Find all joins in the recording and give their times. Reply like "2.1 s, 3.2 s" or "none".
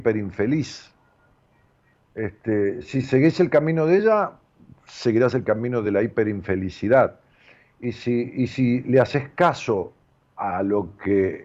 none